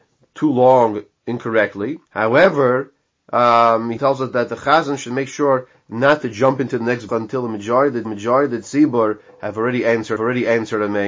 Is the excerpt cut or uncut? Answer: cut